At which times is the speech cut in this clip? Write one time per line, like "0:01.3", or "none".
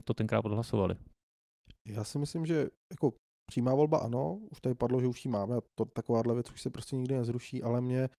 none